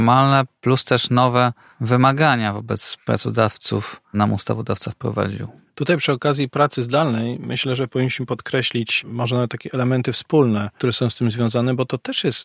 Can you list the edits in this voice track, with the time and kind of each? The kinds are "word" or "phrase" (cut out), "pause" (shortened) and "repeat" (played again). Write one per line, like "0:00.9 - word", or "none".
none